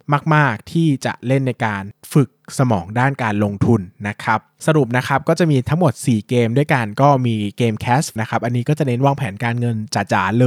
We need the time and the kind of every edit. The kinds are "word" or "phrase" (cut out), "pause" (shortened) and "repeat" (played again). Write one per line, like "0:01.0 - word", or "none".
0:08.2 - word